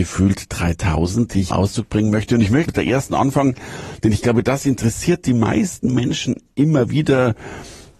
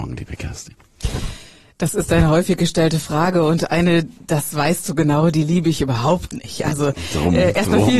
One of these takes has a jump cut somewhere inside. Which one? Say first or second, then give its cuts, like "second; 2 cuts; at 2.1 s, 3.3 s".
first; 2 cuts; at 1.5 s, 2.7 s